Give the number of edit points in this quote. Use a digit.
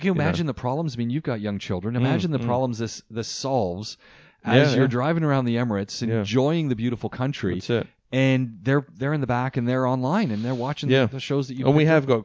0